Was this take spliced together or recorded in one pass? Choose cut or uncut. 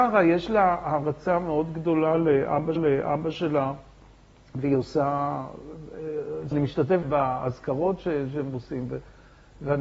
cut